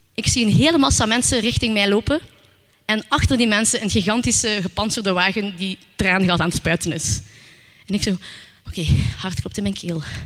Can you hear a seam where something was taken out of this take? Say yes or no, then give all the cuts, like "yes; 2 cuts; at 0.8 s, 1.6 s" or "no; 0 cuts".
no; 0 cuts